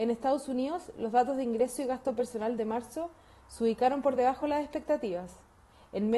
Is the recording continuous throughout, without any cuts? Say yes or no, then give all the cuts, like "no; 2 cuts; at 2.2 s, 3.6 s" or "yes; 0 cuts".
yes; 0 cuts